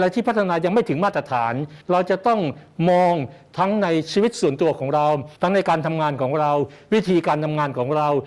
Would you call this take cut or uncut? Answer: cut